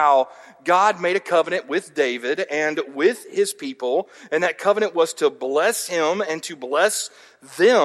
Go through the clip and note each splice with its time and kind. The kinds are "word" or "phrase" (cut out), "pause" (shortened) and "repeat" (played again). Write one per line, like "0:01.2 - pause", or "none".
none